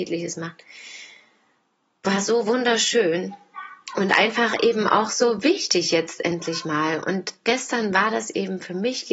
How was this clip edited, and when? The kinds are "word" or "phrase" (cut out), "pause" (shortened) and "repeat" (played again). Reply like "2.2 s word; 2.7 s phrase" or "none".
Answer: none